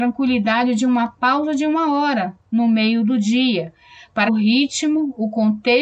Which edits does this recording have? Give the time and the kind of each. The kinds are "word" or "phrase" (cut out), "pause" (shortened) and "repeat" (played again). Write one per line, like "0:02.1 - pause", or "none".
0:04.3 - word

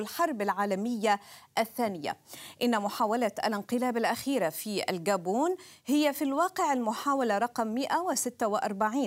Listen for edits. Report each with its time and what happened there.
none

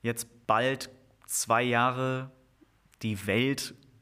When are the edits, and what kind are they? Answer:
none

